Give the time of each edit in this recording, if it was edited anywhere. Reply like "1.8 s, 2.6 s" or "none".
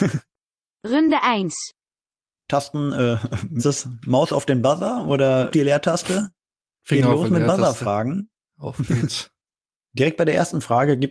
3.6 s, 5.5 s